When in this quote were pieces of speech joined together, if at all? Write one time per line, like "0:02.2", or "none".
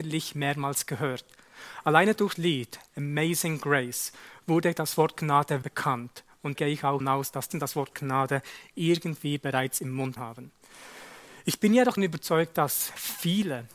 0:02.3
0:05.6
0:06.5
0:07.0
0:07.5
0:10.2
0:12.0